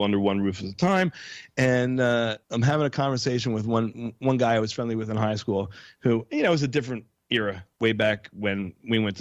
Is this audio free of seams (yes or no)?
no